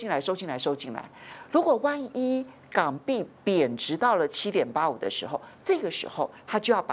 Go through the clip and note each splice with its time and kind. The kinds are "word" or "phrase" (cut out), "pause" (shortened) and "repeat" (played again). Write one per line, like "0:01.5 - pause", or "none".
0:05.5 - pause